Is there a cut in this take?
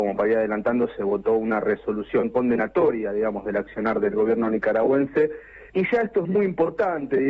yes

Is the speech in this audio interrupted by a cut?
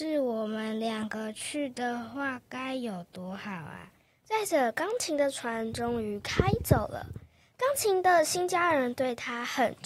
no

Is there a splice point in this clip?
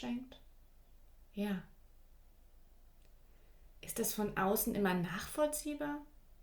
no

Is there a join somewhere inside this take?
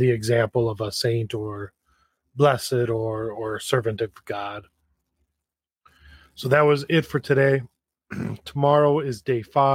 no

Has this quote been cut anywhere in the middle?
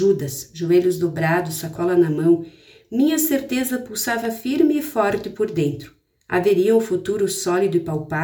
no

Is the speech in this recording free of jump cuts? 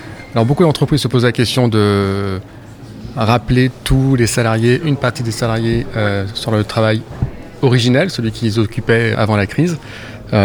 no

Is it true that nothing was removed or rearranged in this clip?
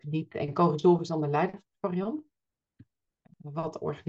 yes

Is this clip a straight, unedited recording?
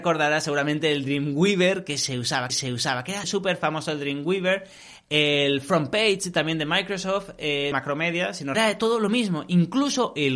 no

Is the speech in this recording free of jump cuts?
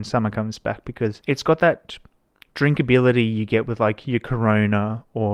yes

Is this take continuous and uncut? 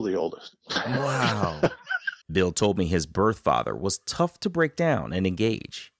no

